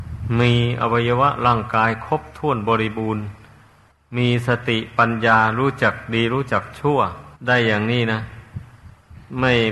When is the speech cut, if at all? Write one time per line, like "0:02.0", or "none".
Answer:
0:03.9
0:07.4